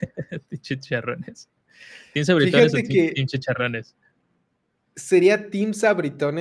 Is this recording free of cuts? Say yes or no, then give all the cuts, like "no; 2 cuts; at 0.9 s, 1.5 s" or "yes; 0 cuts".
yes; 0 cuts